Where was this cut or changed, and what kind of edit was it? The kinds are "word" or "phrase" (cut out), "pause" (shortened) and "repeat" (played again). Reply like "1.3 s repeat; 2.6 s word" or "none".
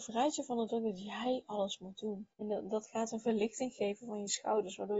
2.3 s pause